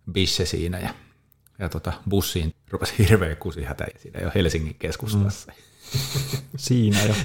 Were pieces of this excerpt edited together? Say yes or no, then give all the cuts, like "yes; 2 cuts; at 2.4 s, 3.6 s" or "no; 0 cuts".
yes; 2 cuts; at 2.5 s, 3.9 s